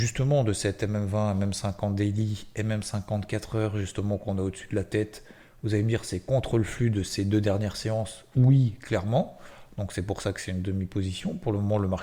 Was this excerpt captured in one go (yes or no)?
yes